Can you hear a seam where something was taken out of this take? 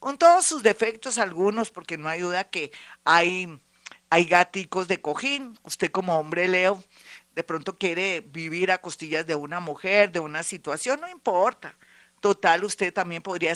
no; 0 cuts

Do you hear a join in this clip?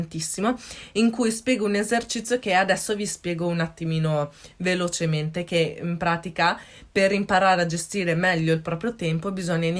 no; 0 cuts

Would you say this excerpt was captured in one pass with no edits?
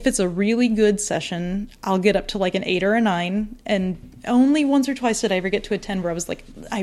yes; 0 cuts

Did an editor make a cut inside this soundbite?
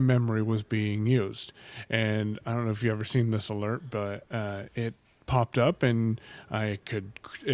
no; 0 cuts

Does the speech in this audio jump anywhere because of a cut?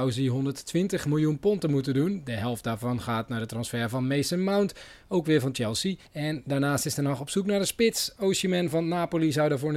yes; 1 cut; at 6.1 s

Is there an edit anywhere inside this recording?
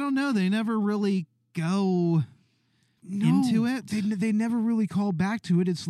no; 0 cuts

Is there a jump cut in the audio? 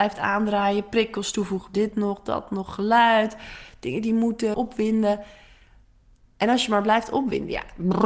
yes; 2 cuts; at 1.7 s, 4.5 s

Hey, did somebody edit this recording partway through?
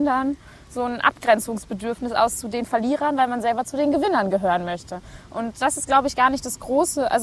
no; 0 cuts

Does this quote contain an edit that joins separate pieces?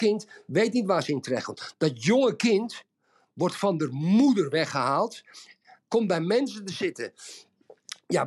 no; 0 cuts

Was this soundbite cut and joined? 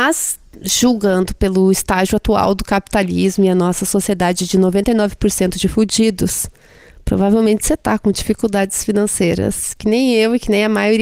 no; 0 cuts

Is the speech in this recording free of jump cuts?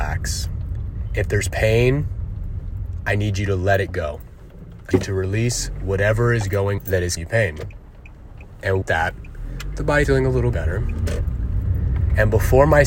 no; 6 cuts; at 4.9 s, 6.8 s, 7.2 s, 8.8 s, 10.0 s, 10.5 s

